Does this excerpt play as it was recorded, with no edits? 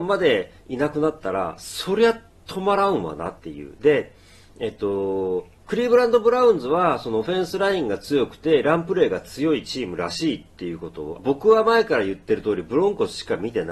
no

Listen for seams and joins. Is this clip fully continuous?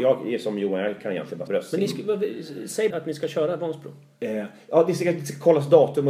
no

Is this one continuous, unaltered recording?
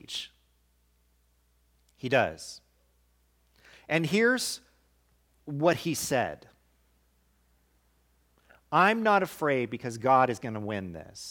yes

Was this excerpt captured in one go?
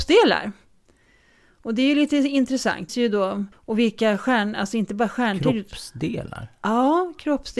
no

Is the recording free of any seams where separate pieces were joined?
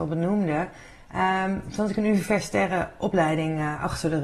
yes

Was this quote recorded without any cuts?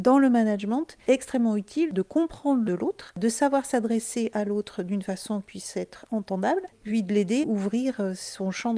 no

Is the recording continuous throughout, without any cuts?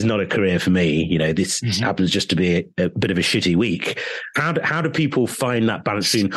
yes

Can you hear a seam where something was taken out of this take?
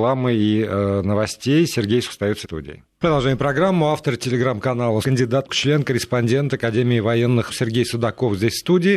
yes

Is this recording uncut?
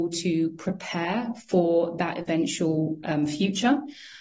yes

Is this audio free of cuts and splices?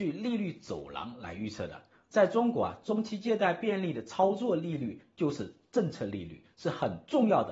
yes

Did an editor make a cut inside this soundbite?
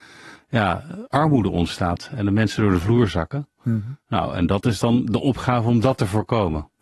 no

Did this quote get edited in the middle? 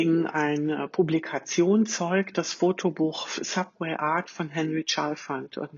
no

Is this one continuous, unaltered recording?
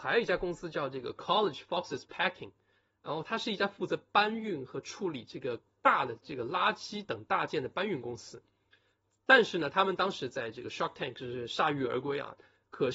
yes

